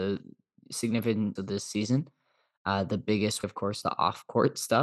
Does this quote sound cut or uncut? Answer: cut